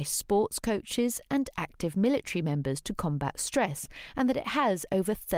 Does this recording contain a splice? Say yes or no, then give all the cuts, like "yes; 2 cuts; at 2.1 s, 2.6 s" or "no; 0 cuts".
no; 0 cuts